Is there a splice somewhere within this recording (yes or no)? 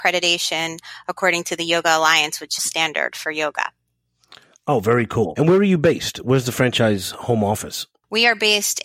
yes